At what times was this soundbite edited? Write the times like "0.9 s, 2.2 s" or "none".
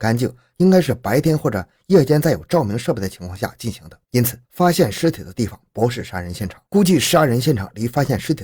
4.0 s, 4.4 s, 6.7 s